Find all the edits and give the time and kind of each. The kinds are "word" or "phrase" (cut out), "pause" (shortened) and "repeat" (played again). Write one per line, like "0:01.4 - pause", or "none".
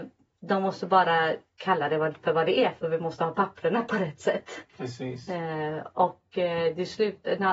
0:04.7 - pause

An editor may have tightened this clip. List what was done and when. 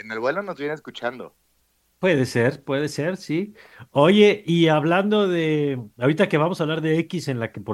none

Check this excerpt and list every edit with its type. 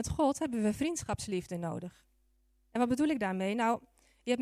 none

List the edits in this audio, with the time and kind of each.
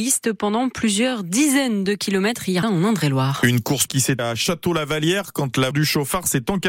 0:02.6 - word
0:03.9 - word
0:04.2 - word
0:05.7 - word

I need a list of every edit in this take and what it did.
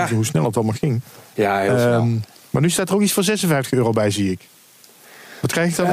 none

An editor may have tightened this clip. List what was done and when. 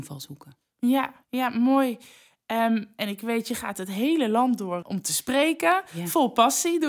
0:01.2 - pause
0:04.8 - word

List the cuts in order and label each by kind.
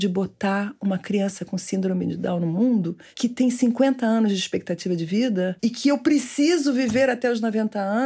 0:05.6 - pause

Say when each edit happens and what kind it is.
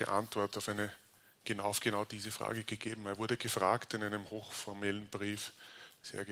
none

